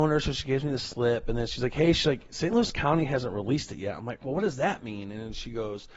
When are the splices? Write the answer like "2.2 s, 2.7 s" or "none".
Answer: none